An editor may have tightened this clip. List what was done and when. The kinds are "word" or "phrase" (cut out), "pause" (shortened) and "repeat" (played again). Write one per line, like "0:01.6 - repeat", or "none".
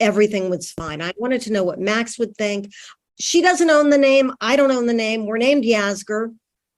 none